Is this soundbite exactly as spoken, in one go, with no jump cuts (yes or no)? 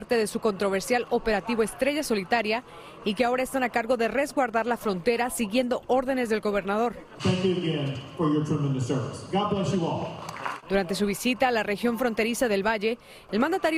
yes